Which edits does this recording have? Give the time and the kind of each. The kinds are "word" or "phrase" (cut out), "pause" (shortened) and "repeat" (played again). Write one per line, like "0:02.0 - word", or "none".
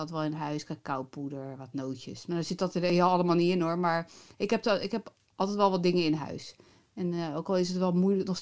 none